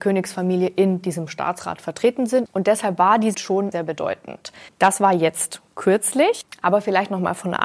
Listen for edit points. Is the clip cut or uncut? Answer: cut